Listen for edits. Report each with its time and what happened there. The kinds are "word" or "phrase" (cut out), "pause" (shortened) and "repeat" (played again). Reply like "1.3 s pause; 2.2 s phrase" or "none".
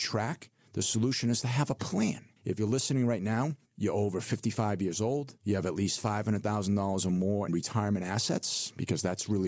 2.4 s pause; 3.6 s pause; 5.4 s pause; 7.5 s word